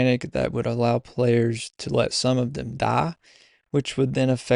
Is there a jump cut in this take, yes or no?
no